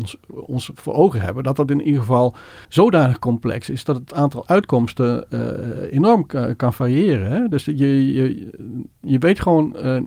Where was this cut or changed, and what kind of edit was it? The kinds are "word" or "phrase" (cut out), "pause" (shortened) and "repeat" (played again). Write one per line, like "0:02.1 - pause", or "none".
0:02.6 - pause